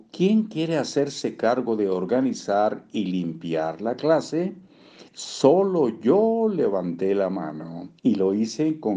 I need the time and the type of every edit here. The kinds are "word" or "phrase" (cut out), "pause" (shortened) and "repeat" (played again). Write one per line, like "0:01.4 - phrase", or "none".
0:05.1 - pause
0:08.0 - pause